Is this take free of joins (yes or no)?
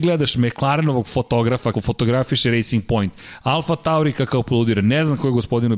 no